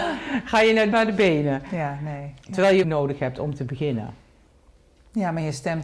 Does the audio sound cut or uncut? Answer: cut